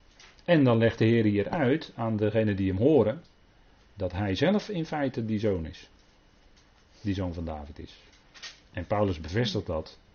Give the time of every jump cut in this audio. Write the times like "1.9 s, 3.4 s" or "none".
none